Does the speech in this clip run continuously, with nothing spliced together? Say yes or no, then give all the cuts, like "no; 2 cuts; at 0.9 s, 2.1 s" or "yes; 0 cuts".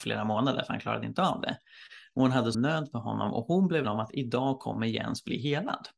no; 2 cuts; at 2.5 s, 3.8 s